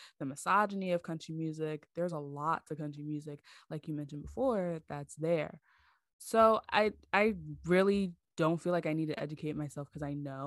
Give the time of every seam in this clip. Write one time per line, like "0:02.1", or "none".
none